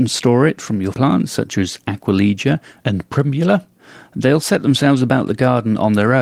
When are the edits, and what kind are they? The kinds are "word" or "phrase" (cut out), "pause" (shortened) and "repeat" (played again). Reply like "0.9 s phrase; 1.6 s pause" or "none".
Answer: 0.9 s word